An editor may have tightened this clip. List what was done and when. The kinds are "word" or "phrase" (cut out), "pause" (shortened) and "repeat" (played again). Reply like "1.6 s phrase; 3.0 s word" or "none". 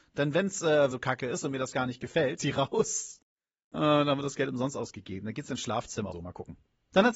0.9 s word; 2.4 s phrase; 6.1 s word

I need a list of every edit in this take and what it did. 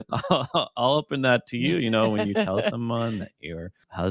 none

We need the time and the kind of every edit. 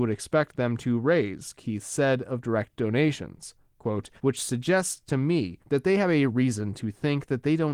4.2 s pause; 5.6 s pause

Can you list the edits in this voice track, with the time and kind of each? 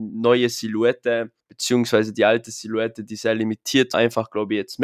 1.4 s pause; 3.9 s word

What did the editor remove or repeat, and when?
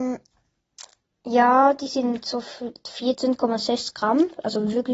1.1 s pause

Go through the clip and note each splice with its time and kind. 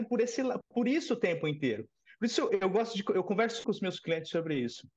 2.5 s word; 3.6 s word

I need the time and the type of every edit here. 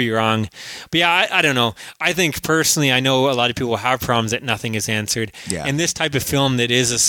none

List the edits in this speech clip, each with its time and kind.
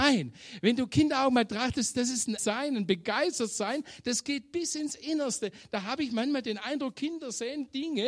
2.4 s word

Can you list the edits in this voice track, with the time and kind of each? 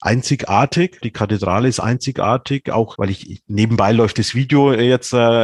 1.0 s word; 2.9 s word

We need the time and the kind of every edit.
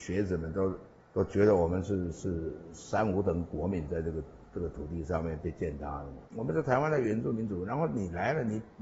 1.0 s pause; 6.3 s pause

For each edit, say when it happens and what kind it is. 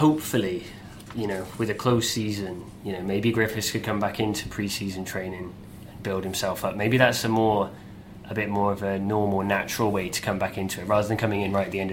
none

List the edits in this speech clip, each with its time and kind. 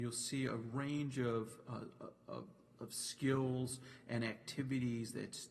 none

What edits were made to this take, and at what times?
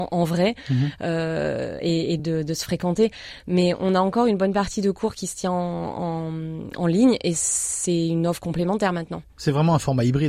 none

